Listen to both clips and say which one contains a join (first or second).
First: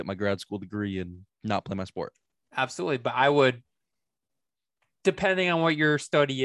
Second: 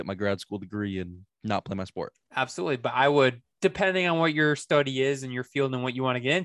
second